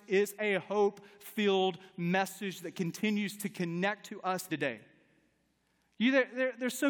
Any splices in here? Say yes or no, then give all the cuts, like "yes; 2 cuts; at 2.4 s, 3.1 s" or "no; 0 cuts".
yes; 1 cut; at 4.5 s